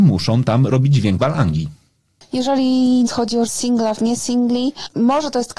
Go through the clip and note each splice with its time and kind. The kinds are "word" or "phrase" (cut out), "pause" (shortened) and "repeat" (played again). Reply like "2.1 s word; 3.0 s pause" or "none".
1.2 s word; 3.1 s word; 3.5 s word; 4.0 s word